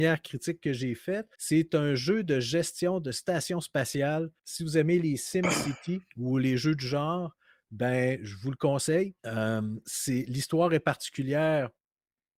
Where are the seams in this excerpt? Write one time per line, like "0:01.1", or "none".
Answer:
0:01.3
0:04.4
0:06.1
0:09.2